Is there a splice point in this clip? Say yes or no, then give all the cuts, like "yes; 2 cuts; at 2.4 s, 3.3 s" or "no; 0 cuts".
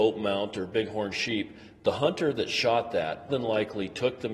yes; 1 cut; at 3.3 s